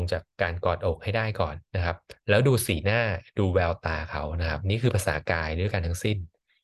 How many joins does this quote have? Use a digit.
1